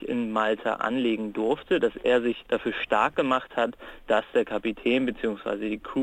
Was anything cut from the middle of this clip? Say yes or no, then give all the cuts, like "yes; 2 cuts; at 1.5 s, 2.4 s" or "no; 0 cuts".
no; 0 cuts